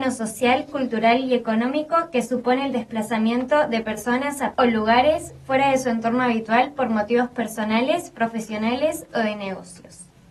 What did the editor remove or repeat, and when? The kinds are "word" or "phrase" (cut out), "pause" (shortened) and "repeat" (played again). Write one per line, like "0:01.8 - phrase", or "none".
0:04.5 - word